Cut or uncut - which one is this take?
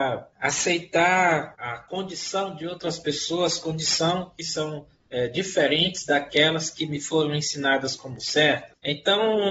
uncut